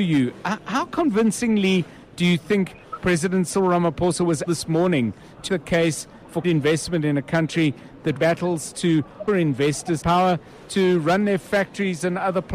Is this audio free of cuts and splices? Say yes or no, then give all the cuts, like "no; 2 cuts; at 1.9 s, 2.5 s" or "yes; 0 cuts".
no; 6 cuts; at 4.5 s, 5.5 s, 6.4 s, 8.2 s, 9.3 s, 10.0 s